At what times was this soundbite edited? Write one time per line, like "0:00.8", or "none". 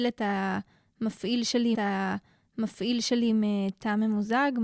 0:01.7